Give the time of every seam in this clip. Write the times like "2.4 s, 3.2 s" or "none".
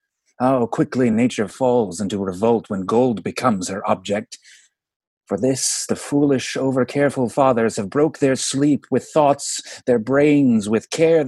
none